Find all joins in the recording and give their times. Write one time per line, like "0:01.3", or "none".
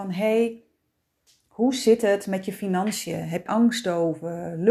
0:03.5